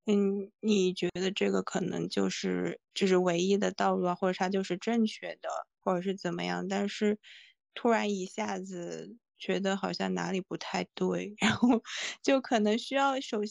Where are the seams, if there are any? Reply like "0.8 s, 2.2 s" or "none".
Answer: 2.8 s, 5.7 s